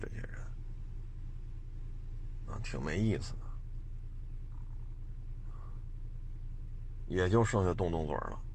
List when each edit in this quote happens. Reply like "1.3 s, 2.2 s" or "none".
none

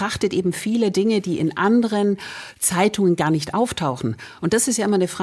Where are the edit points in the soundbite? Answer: none

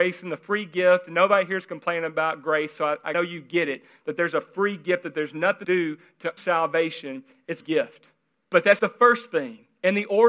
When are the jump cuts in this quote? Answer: 3.1 s, 5.6 s, 6.4 s, 7.6 s, 8.3 s, 8.8 s

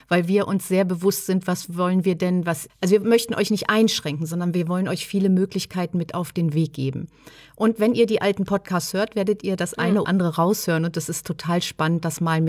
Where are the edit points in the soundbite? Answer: 2.7 s, 10.0 s

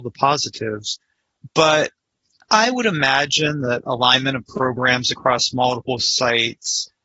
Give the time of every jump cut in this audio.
none

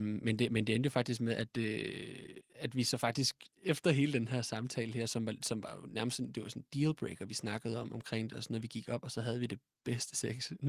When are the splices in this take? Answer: 2.5 s, 3.5 s

